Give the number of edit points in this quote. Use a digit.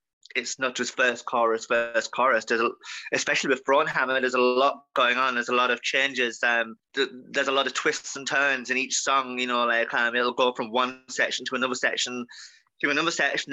1